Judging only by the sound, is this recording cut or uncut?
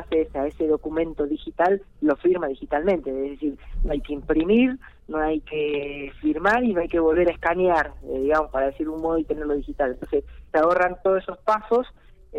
cut